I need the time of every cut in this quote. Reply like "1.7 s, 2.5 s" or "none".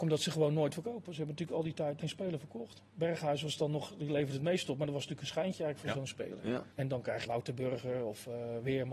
2.0 s, 6.7 s, 7.3 s